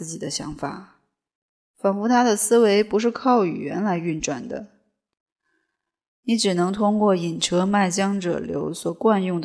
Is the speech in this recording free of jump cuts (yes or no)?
yes